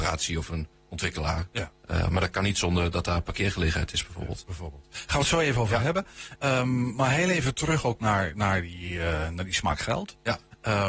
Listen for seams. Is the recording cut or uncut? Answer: uncut